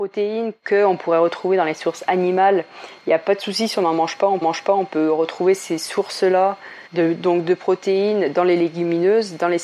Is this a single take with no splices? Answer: no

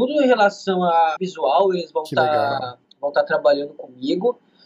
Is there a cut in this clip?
yes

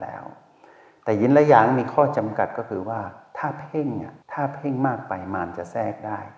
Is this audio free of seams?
no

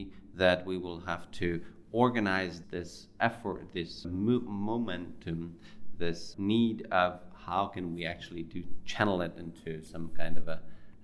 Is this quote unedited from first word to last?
no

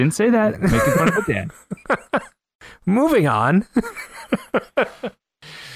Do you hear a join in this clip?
no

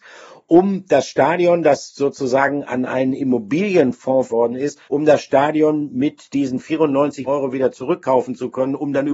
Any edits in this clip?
yes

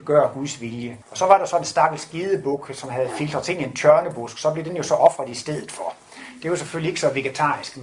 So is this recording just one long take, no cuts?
no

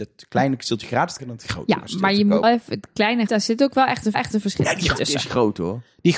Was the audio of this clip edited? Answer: yes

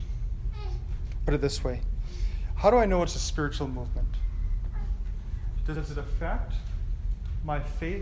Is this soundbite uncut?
no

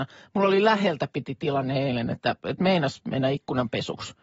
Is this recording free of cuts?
yes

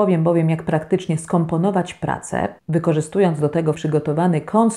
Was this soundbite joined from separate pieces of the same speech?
yes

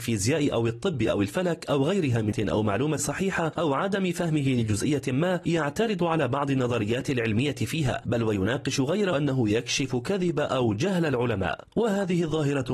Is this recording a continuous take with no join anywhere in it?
no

